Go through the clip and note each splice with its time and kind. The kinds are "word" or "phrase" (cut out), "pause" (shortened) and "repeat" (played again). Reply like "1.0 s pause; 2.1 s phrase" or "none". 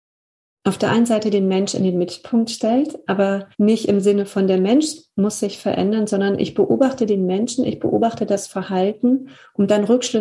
3.5 s pause